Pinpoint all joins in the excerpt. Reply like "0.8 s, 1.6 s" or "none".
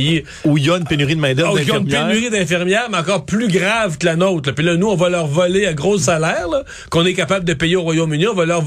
none